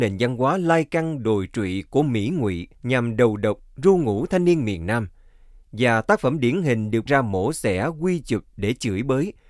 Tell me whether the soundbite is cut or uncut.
cut